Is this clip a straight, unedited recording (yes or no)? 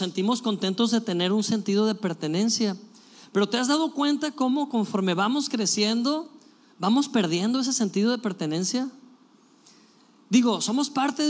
yes